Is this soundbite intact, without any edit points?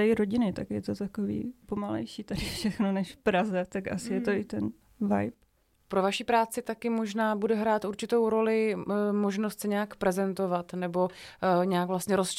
yes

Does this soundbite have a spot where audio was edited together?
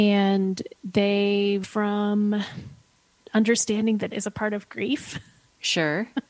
yes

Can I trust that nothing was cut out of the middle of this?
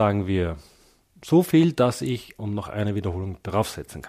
no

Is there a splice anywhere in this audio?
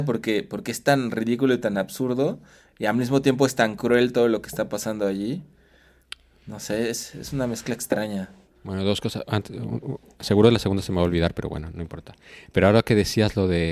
no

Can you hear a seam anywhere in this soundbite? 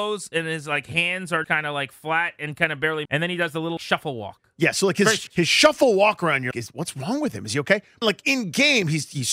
yes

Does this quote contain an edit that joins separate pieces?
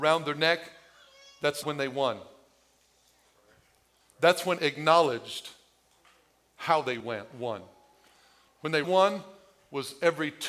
yes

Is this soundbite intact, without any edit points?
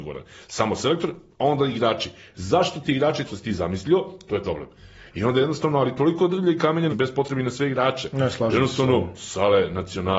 no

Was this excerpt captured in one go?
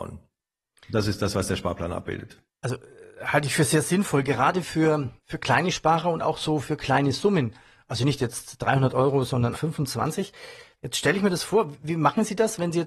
no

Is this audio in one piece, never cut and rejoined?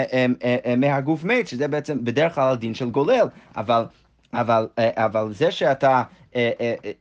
yes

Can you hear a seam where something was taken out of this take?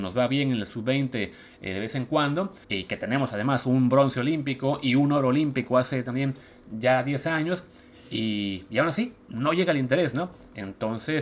yes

